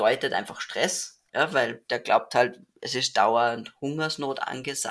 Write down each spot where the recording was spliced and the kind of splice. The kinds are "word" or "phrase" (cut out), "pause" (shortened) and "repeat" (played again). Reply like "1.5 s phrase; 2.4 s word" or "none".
1.3 s pause